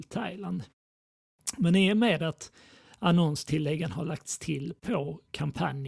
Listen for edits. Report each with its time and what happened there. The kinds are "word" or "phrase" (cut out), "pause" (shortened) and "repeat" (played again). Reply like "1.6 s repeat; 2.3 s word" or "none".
none